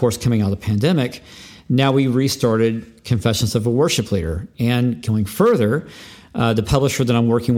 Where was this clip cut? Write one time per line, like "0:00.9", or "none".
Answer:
none